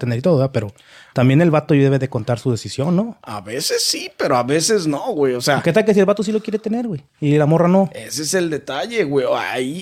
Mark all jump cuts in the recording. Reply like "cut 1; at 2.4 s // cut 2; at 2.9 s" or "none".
none